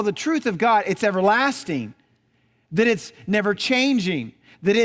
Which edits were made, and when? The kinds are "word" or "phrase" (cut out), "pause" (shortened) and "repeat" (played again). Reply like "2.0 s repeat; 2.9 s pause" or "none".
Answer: none